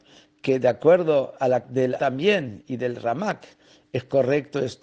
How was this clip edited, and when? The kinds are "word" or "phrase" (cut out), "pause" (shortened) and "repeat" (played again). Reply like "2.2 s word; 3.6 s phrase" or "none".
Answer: 1.6 s word; 2.0 s word